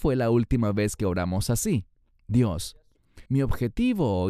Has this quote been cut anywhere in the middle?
yes; 1 cut; at 3.3 s

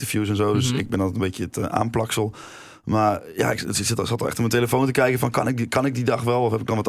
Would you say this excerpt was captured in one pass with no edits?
yes; 0 cuts

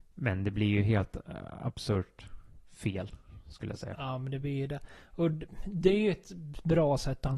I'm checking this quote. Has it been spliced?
no; 0 cuts

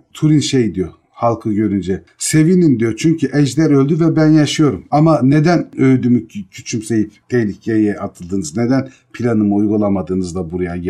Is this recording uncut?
yes; 0 cuts

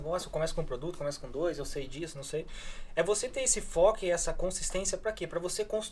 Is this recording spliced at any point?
no; 0 cuts

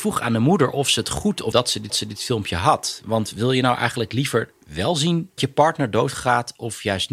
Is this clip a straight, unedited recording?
no; 4 cuts; at 1.5 s, 1.9 s, 4.6 s, 5.4 s

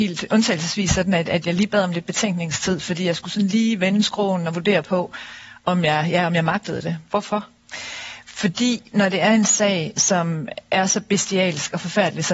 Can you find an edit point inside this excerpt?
yes; 1 cut; at 7.1 s

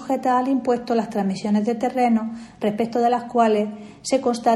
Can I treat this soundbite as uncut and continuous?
yes; 0 cuts

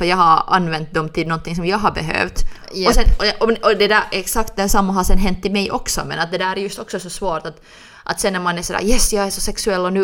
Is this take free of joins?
yes; 0 cuts

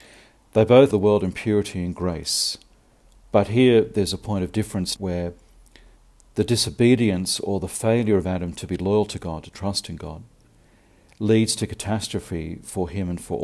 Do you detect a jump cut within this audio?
yes; 2 cuts; at 0.9 s, 5.0 s

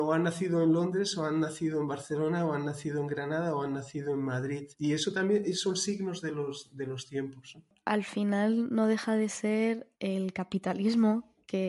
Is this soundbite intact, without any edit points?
no; 2 cuts; at 4.7 s, 9.9 s

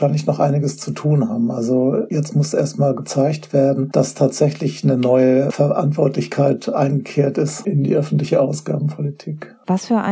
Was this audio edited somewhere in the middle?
no; 0 cuts

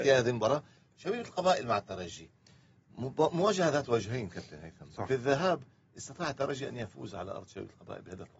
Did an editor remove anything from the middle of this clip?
no; 0 cuts

